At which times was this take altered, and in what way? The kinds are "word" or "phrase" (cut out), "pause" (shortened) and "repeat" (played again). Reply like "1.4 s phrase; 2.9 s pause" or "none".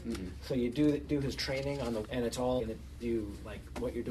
1.1 s word; 2.0 s word; 2.6 s word; 3.0 s word